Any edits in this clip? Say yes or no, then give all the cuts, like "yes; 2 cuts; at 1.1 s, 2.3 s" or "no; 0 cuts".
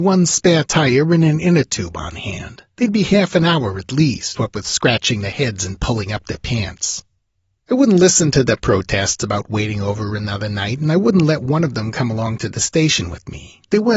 no; 0 cuts